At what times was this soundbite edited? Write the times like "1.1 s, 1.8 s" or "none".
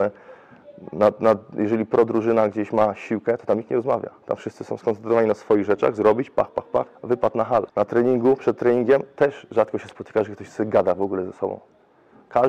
6.9 s, 7.7 s